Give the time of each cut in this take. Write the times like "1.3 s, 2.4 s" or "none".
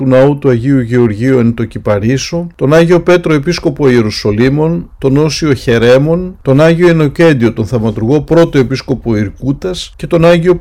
none